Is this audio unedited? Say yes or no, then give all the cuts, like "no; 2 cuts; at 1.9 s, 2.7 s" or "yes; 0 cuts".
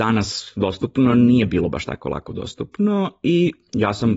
yes; 0 cuts